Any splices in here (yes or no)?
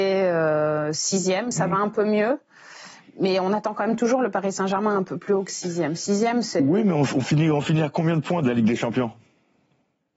no